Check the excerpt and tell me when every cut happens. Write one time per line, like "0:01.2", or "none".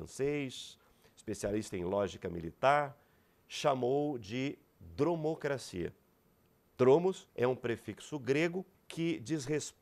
0:07.3
0:08.7